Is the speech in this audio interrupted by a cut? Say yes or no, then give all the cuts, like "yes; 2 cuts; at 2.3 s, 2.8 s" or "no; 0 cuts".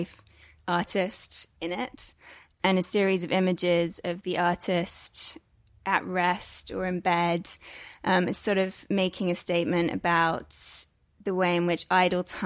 no; 0 cuts